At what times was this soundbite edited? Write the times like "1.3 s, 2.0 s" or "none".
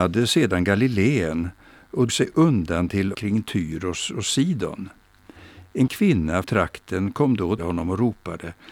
2.1 s, 3.1 s, 5.9 s, 6.4 s, 7.6 s